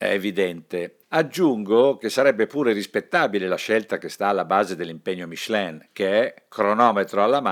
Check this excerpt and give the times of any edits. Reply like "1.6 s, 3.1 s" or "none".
1.0 s

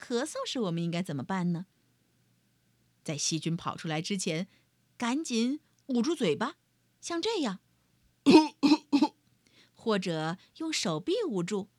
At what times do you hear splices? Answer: none

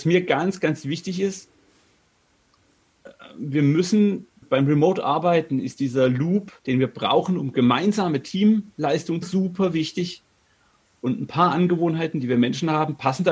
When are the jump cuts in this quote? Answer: 4.4 s, 6.6 s, 9.2 s

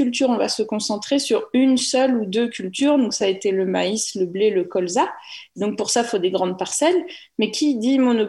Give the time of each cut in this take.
none

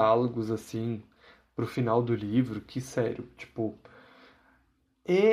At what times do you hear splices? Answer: none

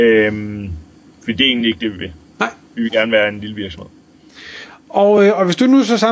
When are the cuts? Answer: none

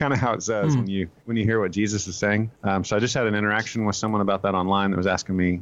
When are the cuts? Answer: 1.2 s, 2.5 s

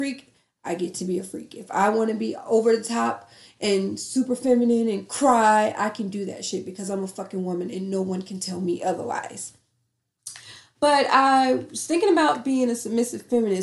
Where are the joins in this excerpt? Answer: none

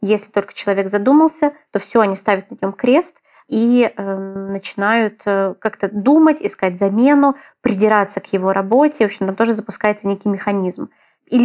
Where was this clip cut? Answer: none

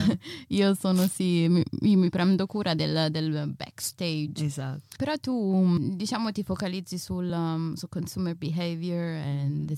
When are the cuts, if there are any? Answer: none

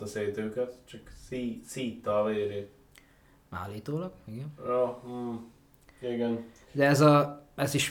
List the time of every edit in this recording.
none

